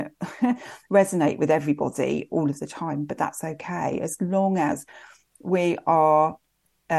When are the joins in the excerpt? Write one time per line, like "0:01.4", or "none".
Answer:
none